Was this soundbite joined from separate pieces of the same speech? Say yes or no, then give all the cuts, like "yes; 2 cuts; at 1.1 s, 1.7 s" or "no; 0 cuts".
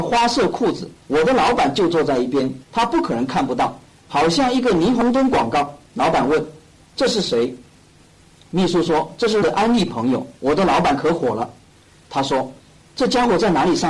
yes; 5 cuts; at 1.0 s, 2.6 s, 5.9 s, 9.4 s, 10.4 s